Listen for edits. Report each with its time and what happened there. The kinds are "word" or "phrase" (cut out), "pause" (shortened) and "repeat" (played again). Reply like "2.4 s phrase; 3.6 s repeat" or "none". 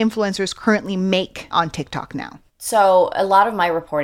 1.5 s word; 2.5 s pause